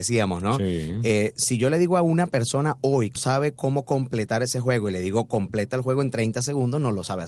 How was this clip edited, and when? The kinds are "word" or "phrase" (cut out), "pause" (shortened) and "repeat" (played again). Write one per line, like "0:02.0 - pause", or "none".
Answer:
0:03.2 - word